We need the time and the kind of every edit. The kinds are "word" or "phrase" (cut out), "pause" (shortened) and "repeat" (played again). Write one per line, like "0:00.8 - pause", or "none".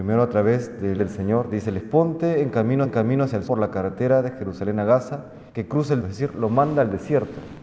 0:01.0 - word
0:01.8 - phrase
0:02.8 - repeat
0:03.5 - word
0:05.5 - pause
0:06.0 - word